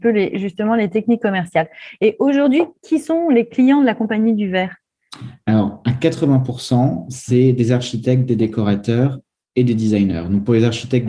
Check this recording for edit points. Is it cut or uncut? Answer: uncut